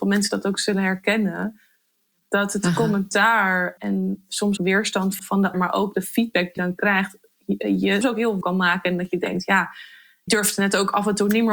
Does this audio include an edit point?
yes; 8 cuts; at 3.8 s, 4.6 s, 5.2 s, 5.5 s, 6.6 s, 8.0 s, 8.4 s, 10.3 s

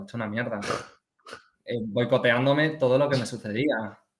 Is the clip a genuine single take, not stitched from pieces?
yes; 0 cuts

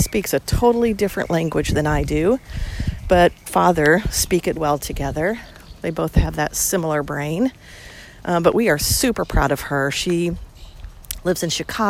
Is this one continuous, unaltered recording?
no; 2 cuts; at 3.5 s, 4.6 s

